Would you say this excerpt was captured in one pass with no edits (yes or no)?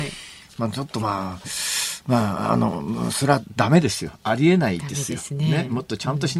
yes